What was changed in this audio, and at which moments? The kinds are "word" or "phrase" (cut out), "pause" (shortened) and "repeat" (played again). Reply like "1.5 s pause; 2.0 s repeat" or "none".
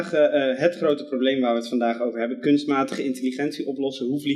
none